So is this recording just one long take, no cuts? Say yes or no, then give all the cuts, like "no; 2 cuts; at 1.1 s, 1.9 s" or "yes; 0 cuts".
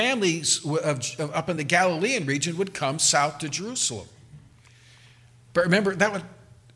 yes; 0 cuts